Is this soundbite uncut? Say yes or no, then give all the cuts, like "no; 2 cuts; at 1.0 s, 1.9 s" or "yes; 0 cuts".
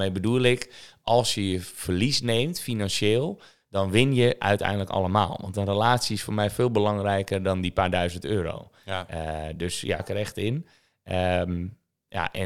no; 1 cut; at 10.0 s